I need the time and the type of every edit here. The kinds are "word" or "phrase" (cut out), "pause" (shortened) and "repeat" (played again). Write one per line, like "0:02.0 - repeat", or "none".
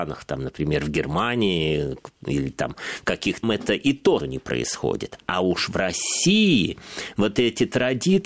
0:03.4 - phrase
0:04.2 - word